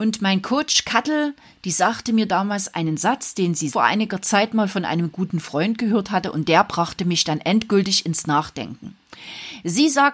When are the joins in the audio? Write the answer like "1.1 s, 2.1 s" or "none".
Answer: 3.7 s